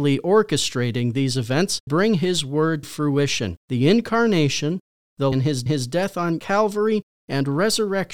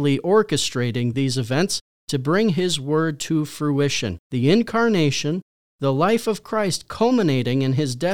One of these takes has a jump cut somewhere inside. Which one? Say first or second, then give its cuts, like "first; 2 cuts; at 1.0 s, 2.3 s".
first; 4 cuts; at 1.9 s, 2.8 s, 5.3 s, 5.7 s